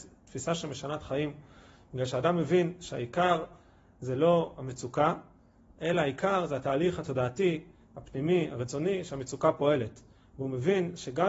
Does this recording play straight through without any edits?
yes; 0 cuts

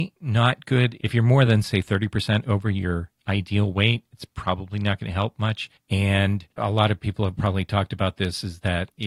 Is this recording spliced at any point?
no; 0 cuts

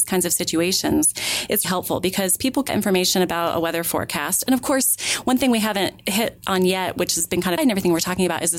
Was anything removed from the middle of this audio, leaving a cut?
yes; 3 cuts; at 1.6 s, 2.7 s, 7.6 s

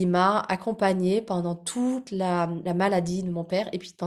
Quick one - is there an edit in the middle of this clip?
no; 0 cuts

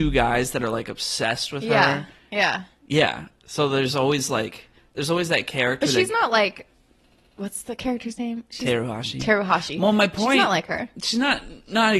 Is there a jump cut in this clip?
no; 0 cuts

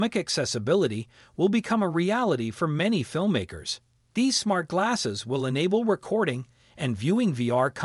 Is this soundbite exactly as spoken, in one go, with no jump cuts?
yes; 0 cuts

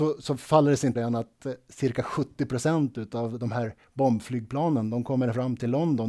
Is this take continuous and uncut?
no; 1 cut; at 1.0 s

